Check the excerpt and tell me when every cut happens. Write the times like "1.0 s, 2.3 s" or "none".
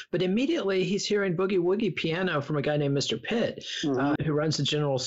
4.2 s